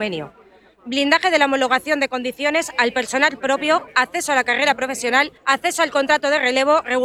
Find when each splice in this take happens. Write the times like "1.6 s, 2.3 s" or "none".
5.4 s